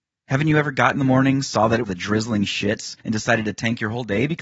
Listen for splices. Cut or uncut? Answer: cut